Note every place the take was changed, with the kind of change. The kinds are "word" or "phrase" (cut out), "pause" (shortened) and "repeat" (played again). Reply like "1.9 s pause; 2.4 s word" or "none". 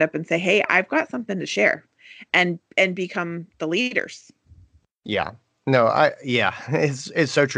none